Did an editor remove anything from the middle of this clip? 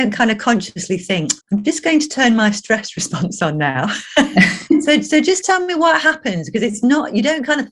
yes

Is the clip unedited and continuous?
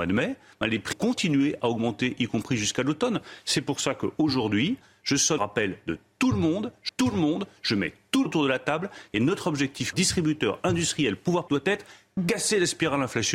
no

